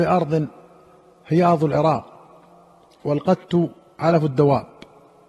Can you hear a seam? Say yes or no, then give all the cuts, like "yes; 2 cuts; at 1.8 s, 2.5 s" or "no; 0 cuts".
no; 0 cuts